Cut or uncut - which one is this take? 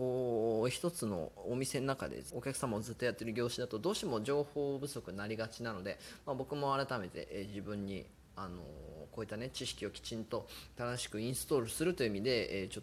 cut